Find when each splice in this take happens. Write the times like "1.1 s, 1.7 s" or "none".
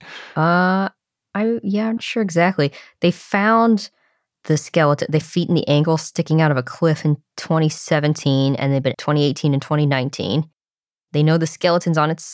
2.0 s, 5.2 s, 8.9 s